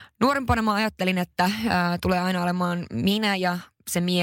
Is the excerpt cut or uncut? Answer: uncut